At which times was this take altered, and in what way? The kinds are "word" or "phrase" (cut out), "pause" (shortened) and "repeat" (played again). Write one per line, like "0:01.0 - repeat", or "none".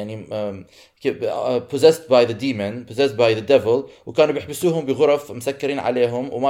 none

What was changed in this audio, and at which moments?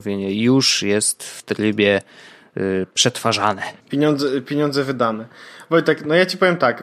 0:03.8 - pause

